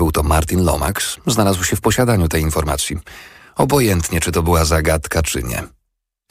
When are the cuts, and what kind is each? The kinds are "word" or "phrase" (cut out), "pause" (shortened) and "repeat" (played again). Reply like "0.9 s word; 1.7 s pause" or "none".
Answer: none